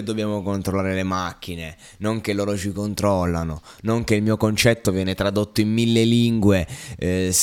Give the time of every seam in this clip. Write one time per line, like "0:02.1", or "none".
none